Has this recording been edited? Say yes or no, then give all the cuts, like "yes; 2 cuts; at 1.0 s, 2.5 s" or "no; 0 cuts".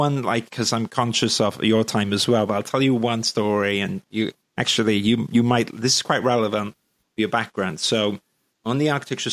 no; 0 cuts